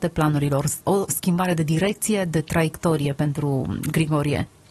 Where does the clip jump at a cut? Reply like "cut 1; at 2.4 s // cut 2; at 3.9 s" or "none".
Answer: cut 1; at 1.1 s